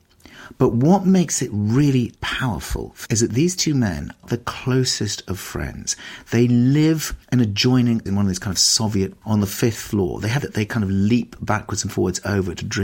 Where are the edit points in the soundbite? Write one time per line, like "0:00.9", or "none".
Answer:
0:02.2
0:03.1
0:04.2
0:07.2
0:08.1
0:09.2
0:10.4